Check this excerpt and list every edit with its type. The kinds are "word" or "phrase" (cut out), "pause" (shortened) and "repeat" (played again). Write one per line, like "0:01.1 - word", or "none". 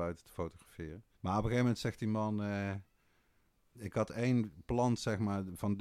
0:01.1 - pause